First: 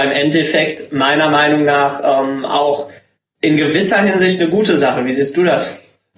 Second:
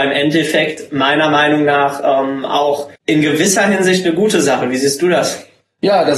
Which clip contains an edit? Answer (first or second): second